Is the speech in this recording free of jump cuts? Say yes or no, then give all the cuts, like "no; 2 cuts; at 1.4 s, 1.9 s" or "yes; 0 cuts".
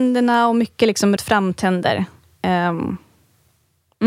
no; 1 cut; at 1.2 s